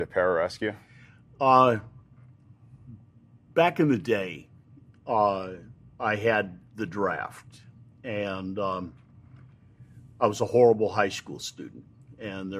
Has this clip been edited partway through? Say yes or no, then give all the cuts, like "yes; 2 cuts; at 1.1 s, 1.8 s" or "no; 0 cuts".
no; 0 cuts